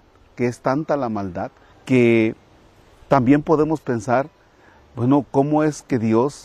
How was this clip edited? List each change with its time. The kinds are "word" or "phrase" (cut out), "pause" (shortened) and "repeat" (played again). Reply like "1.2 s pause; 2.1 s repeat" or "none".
1.7 s pause

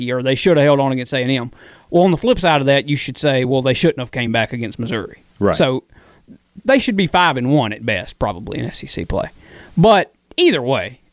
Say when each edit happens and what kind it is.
none

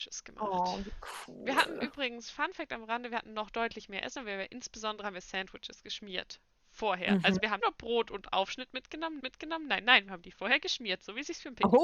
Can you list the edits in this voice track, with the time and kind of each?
7.6 s word; 9.2 s repeat

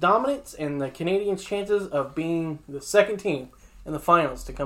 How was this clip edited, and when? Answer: none

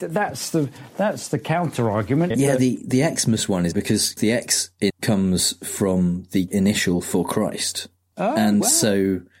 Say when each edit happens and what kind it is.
2.3 s word; 3.7 s word; 4.2 s word; 4.9 s word; 6.5 s word; 8.1 s word

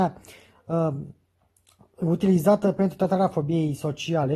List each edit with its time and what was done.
none

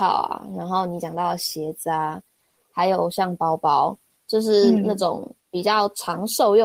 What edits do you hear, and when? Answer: 5.4 s pause

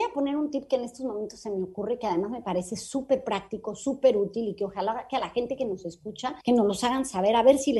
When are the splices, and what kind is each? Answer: 6.4 s pause

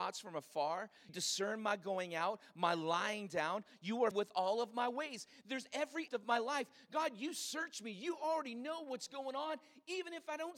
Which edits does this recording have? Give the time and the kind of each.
1.1 s word; 4.1 s word; 6.1 s word

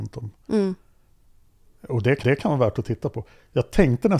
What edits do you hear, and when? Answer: 2.2 s repeat

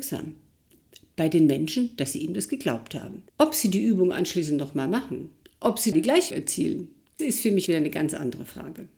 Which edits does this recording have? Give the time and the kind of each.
3.3 s pause; 5.4 s pause; 5.9 s word; 6.3 s word; 7.2 s word; 7.7 s word

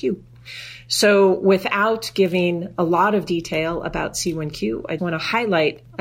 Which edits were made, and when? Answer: 5.0 s word

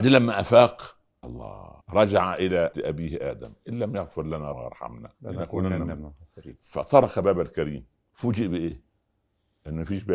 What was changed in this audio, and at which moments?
1.2 s word; 1.8 s pause; 2.7 s word; 4.5 s word; 5.1 s pause; 8.0 s pause

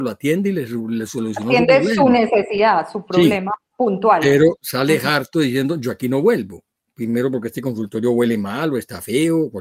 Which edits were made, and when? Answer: none

